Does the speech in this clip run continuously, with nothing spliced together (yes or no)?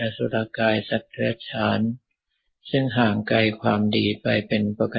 yes